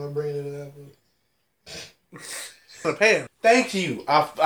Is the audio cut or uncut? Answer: cut